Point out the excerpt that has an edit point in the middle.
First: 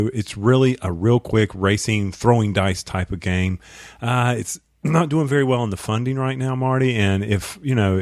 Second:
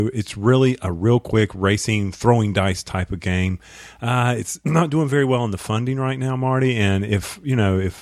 second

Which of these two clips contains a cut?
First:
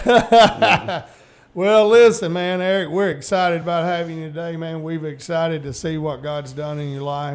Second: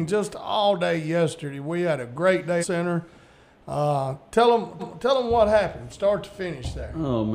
second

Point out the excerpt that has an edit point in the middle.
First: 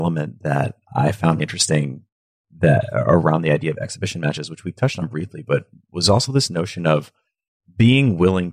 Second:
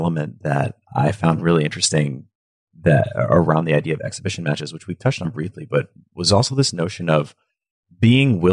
first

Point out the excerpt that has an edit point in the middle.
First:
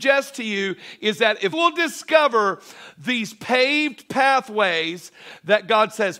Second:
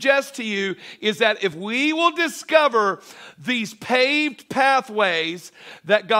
first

